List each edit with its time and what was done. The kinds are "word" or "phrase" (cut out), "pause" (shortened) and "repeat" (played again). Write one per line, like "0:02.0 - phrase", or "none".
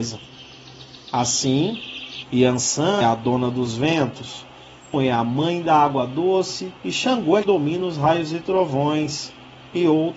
0:03.0 - word
0:04.9 - word
0:06.8 - pause
0:07.4 - word